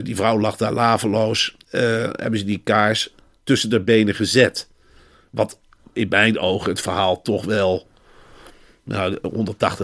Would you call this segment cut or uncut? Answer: uncut